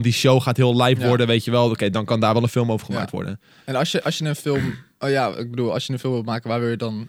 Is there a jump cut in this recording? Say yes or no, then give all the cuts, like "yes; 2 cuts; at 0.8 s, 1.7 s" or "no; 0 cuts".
no; 0 cuts